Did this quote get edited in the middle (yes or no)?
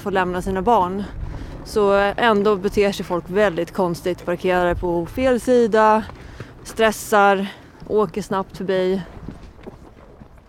no